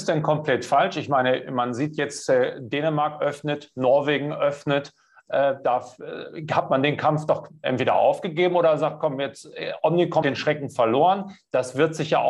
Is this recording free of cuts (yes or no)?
no